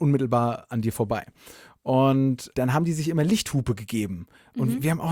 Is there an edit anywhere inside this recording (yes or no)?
yes